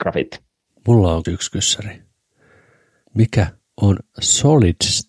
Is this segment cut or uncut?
cut